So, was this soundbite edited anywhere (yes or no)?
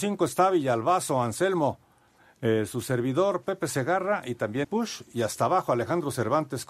yes